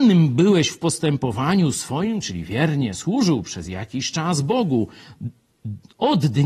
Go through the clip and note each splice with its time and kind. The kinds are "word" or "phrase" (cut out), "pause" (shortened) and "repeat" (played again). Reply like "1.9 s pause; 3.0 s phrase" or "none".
none